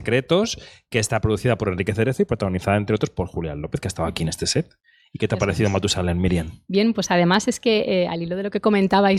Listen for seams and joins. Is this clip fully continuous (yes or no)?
yes